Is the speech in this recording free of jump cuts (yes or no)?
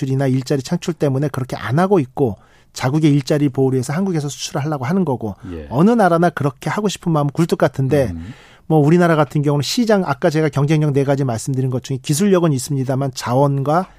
yes